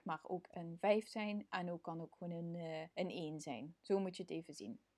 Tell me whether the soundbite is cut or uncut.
cut